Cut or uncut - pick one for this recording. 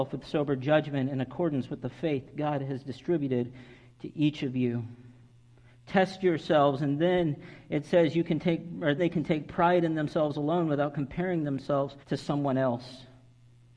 cut